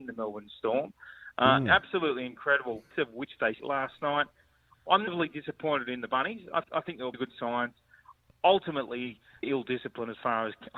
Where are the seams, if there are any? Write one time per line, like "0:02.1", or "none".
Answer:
0:02.9
0:03.6
0:05.1
0:06.6
0:07.1
0:09.4